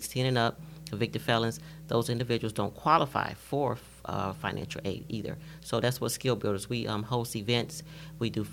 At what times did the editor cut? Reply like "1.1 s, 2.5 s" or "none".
none